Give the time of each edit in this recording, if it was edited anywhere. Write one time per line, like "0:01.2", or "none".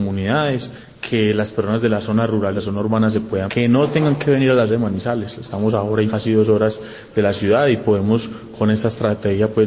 0:02.6
0:03.5
0:04.7
0:06.1